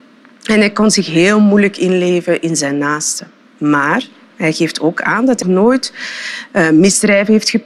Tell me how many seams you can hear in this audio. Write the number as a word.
one